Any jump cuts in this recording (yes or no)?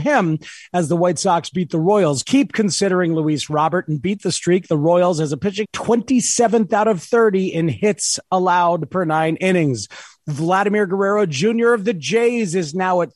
yes